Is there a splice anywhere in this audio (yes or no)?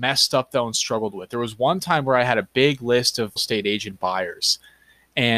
yes